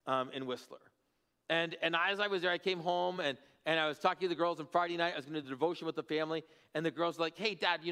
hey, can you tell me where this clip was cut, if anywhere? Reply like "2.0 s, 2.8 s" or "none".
none